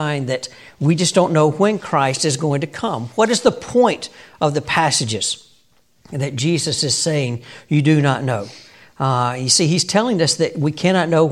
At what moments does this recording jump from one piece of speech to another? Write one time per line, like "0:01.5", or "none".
none